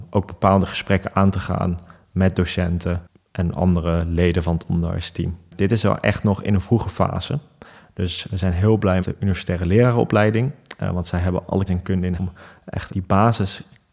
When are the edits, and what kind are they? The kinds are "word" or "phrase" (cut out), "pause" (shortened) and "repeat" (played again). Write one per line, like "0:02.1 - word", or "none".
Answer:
0:09.0 - word
0:11.7 - word
0:12.2 - word
0:12.9 - word